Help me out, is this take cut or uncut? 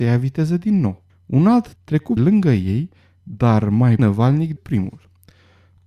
cut